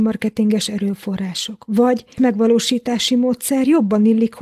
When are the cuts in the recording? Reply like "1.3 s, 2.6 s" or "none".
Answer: 2.2 s